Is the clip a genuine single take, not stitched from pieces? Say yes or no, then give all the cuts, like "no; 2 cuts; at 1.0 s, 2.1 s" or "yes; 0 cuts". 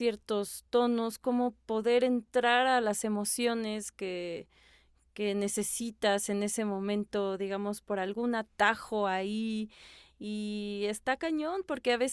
yes; 0 cuts